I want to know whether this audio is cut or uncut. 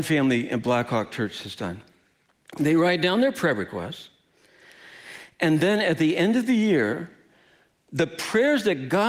uncut